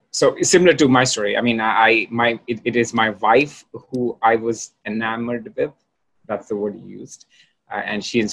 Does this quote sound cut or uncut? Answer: uncut